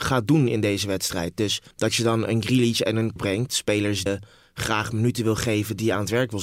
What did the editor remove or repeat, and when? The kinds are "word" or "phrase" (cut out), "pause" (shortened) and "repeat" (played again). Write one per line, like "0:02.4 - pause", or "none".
0:01.7 - pause
0:03.2 - word
0:04.1 - word